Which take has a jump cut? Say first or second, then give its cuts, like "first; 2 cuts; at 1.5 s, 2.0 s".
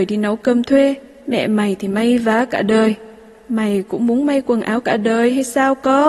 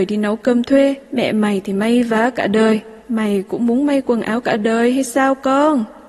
second; 2 cuts; at 1.0 s, 3.0 s